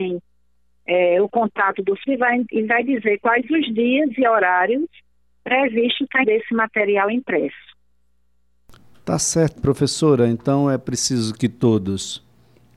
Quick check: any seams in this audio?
yes; 3 cuts; at 2.1 s, 6.2 s, 9.6 s

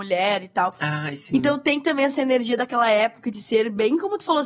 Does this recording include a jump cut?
no; 0 cuts

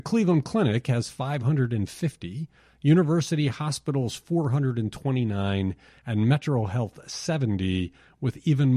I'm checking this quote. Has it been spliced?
no; 0 cuts

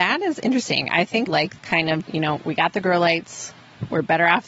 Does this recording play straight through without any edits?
no; 3 cuts; at 1.3 s, 1.6 s, 2.0 s

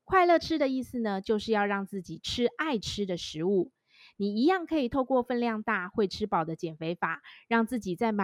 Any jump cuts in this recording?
no; 0 cuts

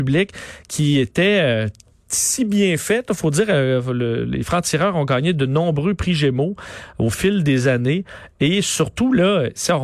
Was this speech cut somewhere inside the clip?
no; 0 cuts

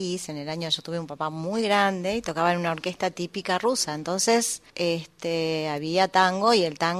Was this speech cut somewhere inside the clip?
yes; 1 cut; at 4.7 s

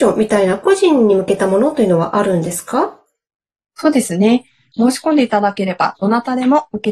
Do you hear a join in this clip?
no; 0 cuts

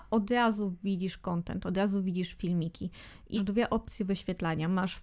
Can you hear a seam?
yes; 1 cut; at 3.3 s

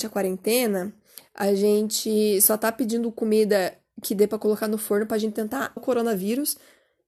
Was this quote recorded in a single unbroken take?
no; 1 cut; at 5.8 s

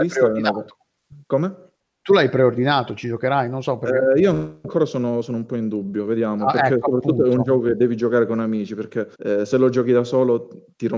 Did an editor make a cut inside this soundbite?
yes; 1 cut; at 9.1 s

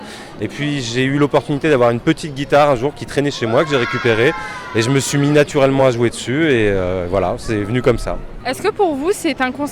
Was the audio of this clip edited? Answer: no; 0 cuts

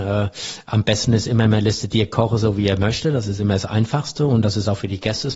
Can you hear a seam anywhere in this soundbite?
no; 0 cuts

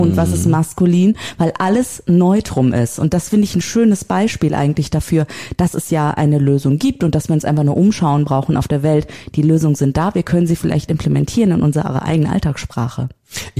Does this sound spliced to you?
no; 0 cuts

